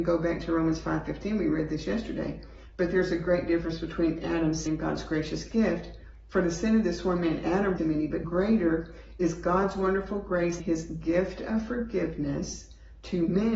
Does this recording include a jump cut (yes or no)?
yes